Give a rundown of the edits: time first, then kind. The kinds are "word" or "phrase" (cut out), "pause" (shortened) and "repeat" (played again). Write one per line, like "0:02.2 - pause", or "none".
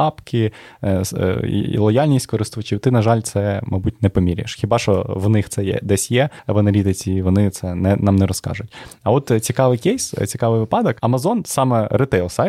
none